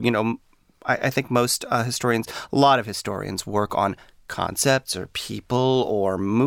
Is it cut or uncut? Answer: uncut